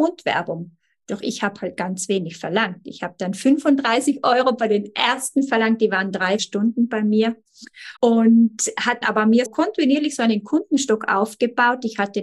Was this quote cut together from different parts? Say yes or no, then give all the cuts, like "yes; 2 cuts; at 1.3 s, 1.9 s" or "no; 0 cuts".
yes; 4 cuts; at 6.4 s, 8.0 s, 9.0 s, 9.5 s